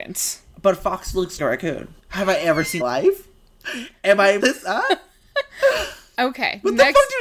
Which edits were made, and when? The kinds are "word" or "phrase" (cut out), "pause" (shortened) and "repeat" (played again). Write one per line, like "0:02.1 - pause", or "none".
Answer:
0:01.4 - phrase
0:02.0 - pause
0:02.8 - phrase
0:04.4 - word